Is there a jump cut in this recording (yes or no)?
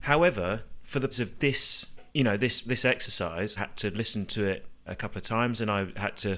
yes